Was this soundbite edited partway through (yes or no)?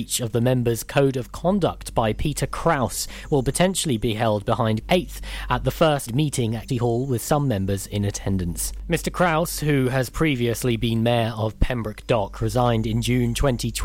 yes